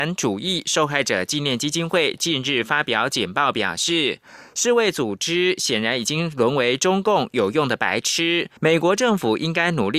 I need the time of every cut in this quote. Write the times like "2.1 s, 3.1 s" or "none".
8.6 s